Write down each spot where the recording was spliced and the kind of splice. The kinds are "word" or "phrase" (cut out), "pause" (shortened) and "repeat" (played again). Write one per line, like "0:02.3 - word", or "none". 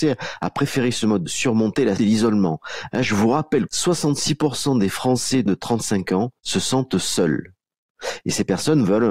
0:01.3 - phrase
0:02.0 - word
0:03.7 - word
0:05.5 - word
0:06.4 - pause